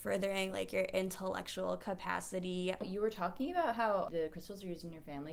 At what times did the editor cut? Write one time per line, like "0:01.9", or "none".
none